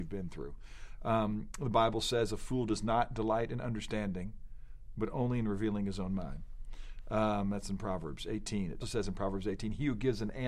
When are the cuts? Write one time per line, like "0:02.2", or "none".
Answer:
0:08.8

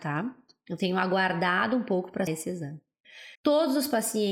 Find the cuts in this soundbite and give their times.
0:02.3
0:03.3

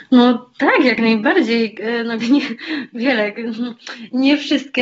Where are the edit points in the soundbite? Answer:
0:02.2

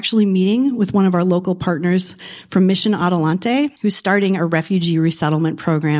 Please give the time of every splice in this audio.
0:03.8

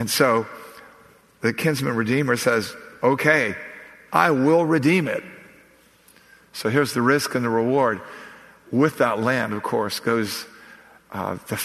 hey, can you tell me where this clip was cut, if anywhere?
none

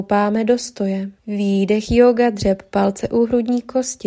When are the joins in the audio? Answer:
0:01.2

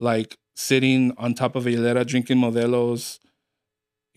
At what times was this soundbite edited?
none

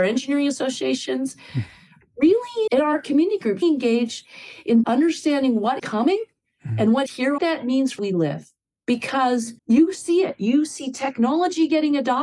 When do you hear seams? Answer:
0:02.7
0:03.6
0:04.8
0:05.8
0:07.1
0:07.4
0:08.0
0:09.6

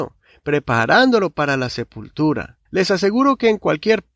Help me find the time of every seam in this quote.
0:02.7

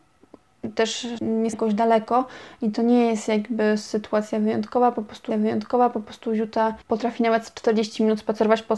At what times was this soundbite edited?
0:01.2
0:01.5
0:05.3
0:06.8

